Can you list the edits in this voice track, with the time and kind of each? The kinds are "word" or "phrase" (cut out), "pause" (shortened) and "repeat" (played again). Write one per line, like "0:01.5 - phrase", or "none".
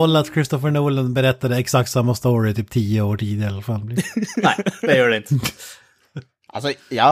none